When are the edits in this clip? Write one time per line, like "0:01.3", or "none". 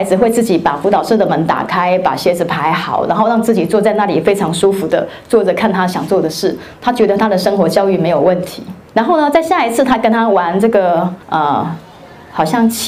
0:08.9
0:11.2